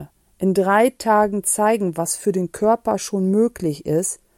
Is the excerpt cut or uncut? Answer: uncut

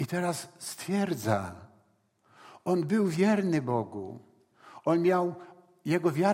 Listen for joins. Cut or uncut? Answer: uncut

